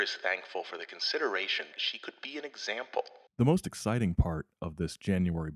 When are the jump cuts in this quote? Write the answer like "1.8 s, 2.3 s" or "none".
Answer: 1.7 s, 3.3 s